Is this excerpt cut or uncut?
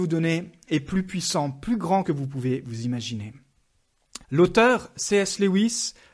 cut